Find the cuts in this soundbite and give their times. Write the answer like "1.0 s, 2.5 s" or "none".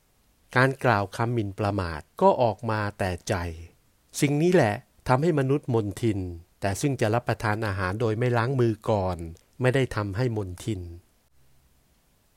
2.1 s, 3.8 s, 6.5 s, 9.4 s